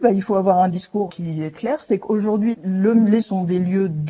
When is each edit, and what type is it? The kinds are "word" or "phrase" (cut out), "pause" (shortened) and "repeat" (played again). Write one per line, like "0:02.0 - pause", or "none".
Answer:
0:01.1 - word
0:01.5 - word
0:02.5 - word
0:03.2 - word